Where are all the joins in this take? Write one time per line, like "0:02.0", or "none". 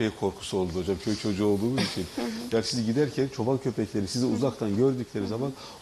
none